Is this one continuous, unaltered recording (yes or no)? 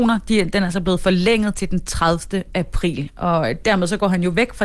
yes